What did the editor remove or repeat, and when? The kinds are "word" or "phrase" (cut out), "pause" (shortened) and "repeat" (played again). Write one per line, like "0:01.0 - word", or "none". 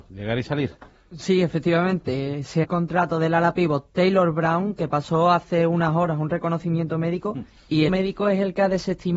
0:02.6 - phrase
0:07.9 - phrase